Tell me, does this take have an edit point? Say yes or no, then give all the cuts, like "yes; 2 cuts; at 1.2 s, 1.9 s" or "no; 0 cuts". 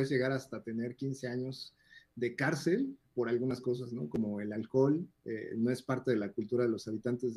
no; 0 cuts